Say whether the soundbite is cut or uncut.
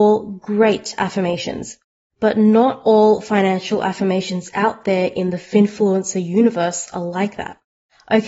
uncut